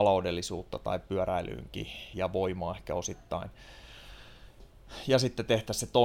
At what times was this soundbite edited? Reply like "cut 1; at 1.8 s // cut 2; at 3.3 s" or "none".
cut 1; at 2.1 s